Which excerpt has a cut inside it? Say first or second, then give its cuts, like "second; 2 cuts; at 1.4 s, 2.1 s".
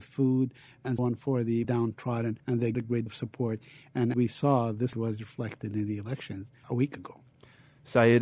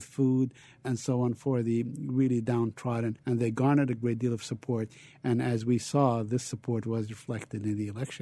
first; 7 cuts; at 1.0 s, 1.6 s, 2.7 s, 3.1 s, 4.1 s, 4.9 s, 6.6 s